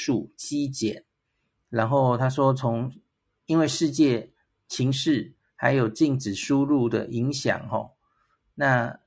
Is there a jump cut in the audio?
no; 0 cuts

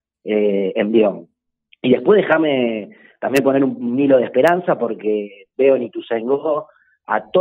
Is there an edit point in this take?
no; 0 cuts

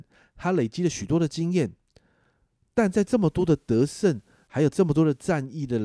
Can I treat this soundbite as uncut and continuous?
yes; 0 cuts

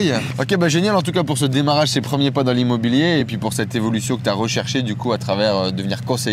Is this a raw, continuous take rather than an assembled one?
yes; 0 cuts

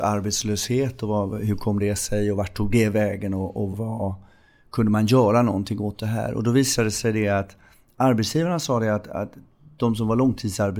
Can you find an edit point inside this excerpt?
yes; 1 cut; at 3.7 s

